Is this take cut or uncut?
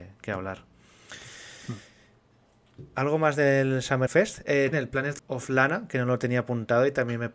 cut